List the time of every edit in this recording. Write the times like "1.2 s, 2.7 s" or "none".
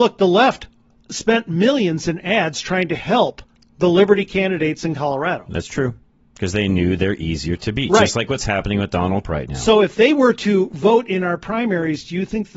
9.2 s